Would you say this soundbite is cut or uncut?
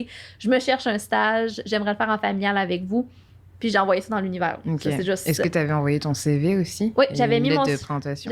uncut